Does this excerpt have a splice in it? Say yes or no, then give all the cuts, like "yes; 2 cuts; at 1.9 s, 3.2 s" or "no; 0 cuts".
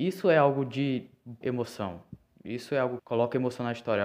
yes; 2 cuts; at 1.4 s, 3.0 s